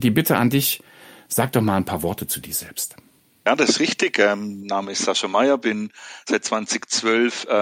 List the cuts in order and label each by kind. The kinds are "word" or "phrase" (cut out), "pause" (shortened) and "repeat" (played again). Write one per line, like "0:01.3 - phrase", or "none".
none